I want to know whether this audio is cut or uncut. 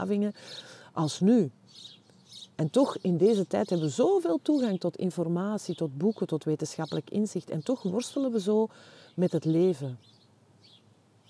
uncut